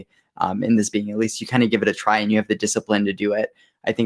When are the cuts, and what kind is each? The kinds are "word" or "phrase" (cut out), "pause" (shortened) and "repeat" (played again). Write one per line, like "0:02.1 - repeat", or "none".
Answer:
0:00.9 - phrase